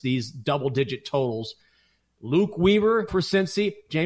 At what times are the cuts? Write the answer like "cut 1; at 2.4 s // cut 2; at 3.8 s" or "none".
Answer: cut 1; at 3.1 s